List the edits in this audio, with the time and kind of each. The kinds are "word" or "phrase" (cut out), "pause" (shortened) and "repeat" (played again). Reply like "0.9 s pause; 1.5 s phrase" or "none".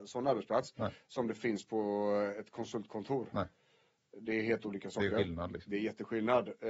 none